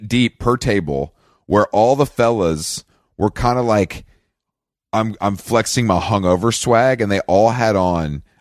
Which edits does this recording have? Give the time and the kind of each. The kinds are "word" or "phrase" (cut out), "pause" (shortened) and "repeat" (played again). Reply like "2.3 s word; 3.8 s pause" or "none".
none